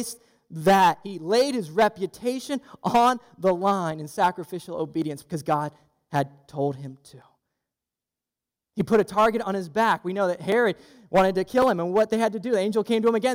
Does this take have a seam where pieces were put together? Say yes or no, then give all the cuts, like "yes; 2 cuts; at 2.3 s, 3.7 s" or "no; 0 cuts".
no; 0 cuts